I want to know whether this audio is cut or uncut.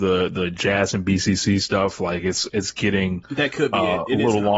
uncut